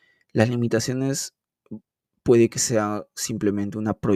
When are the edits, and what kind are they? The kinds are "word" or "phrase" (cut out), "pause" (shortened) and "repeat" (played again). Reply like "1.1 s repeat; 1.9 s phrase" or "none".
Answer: none